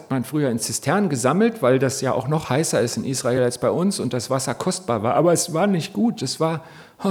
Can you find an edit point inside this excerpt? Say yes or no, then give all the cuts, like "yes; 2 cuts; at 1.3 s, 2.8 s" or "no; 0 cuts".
no; 0 cuts